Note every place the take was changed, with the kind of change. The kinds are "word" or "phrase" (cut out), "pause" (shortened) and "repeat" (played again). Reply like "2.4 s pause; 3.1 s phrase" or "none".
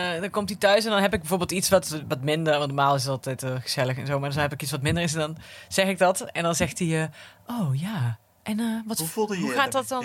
none